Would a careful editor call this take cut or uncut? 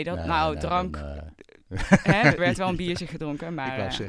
cut